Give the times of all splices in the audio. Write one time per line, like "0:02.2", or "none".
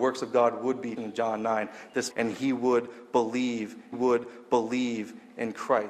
0:01.0
0:02.1
0:03.9